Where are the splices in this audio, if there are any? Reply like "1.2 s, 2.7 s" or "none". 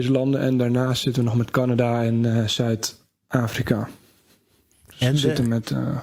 none